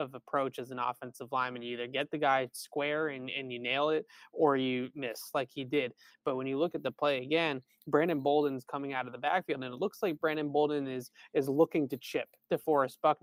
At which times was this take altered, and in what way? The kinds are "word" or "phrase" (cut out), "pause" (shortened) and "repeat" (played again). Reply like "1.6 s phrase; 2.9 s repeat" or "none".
none